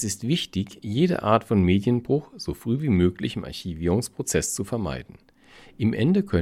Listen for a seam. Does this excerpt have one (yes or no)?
no